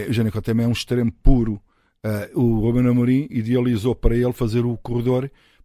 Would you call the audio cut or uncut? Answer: uncut